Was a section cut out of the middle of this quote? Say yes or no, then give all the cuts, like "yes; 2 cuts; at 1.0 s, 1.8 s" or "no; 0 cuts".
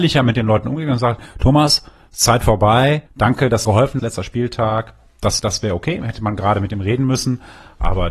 yes; 4 cuts; at 3.1 s, 3.7 s, 4.0 s, 5.4 s